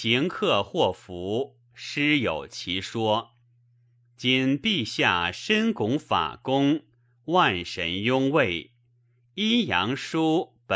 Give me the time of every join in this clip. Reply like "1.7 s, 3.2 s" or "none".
none